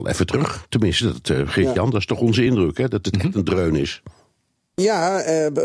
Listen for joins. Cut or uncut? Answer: uncut